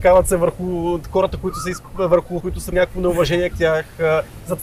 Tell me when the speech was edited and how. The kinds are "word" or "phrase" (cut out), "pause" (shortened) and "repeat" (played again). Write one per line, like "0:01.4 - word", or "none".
0:02.4 - word
0:02.7 - word
0:03.5 - word